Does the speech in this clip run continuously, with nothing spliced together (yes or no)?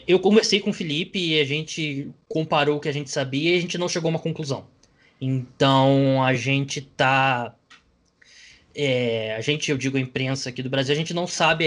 yes